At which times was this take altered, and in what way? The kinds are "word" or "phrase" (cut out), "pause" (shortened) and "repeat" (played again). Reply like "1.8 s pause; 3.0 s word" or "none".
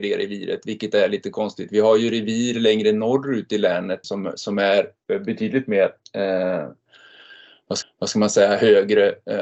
4.0 s word; 7.8 s repeat